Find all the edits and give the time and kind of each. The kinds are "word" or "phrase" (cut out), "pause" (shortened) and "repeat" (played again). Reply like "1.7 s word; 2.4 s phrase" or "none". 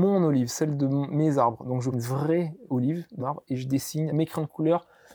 1.9 s word; 2.7 s word; 3.2 s word; 4.1 s word